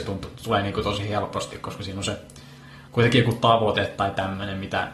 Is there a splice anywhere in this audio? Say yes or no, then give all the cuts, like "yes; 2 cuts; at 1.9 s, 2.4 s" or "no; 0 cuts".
yes; 1 cut; at 2.9 s